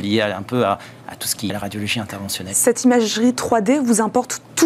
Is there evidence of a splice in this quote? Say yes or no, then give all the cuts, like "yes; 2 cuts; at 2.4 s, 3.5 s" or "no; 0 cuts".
yes; 1 cut; at 1.5 s